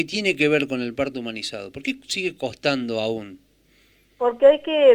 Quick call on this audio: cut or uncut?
uncut